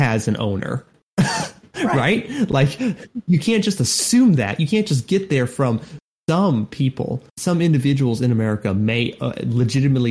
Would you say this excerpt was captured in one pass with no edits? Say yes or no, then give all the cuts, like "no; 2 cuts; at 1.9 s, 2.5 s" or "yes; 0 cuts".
no; 1 cut; at 7.3 s